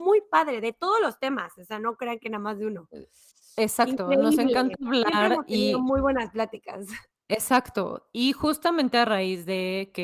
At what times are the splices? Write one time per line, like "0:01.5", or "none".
none

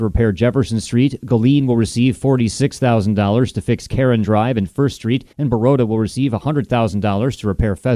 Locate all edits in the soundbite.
0:05.3

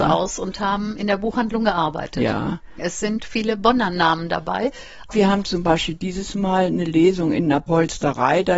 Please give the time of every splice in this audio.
none

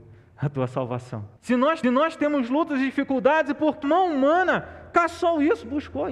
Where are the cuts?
0:01.4
0:01.8
0:03.8

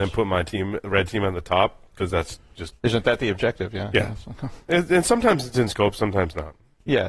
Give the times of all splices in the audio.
none

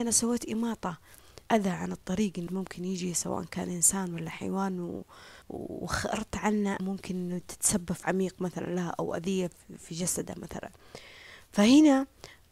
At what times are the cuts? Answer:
0:01.4
0:02.5
0:05.4
0:06.8
0:08.0

